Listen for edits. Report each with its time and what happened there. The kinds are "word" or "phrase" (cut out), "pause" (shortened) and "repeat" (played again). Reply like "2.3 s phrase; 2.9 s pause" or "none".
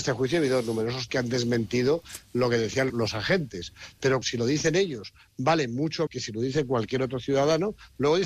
1.1 s word; 2.9 s word; 4.2 s word; 6.1 s word